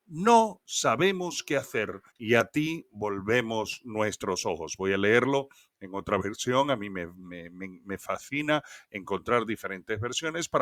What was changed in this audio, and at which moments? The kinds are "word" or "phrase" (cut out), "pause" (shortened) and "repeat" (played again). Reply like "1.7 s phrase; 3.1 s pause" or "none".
2.1 s pause